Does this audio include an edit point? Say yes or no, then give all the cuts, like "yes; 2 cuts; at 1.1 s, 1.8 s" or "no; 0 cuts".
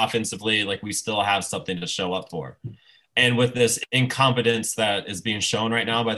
no; 0 cuts